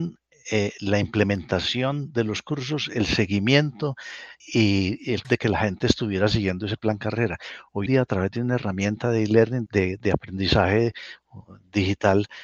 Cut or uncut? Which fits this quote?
cut